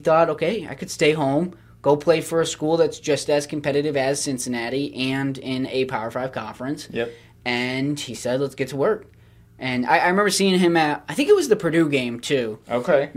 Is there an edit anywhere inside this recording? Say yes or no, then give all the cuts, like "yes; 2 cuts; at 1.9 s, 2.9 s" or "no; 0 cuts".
no; 0 cuts